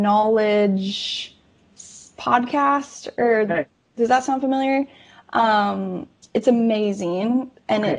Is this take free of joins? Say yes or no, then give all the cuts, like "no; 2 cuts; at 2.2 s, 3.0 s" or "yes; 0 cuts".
yes; 0 cuts